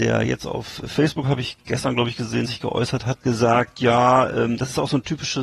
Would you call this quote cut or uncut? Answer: cut